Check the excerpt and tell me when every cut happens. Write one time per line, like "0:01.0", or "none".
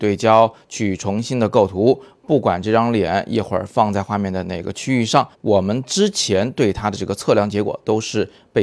0:05.3